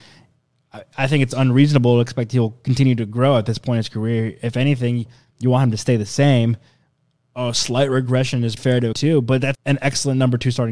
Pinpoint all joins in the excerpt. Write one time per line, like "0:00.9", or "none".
0:08.6
0:08.9
0:09.5